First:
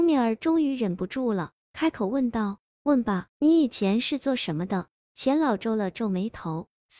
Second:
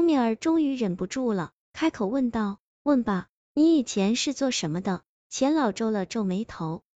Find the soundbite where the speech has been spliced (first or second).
first